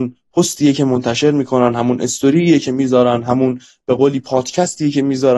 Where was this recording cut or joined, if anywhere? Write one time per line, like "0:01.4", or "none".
none